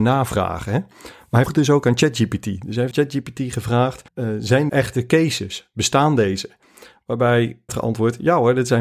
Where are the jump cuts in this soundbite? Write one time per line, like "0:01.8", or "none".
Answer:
0:01.5
0:02.9
0:04.1
0:04.7
0:07.7